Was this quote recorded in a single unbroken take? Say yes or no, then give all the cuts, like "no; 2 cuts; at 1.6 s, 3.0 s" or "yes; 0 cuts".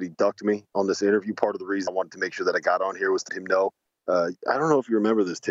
no; 2 cuts; at 1.9 s, 3.3 s